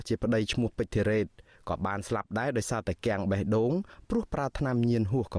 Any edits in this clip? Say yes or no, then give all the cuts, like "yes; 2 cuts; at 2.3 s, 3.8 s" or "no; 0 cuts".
no; 0 cuts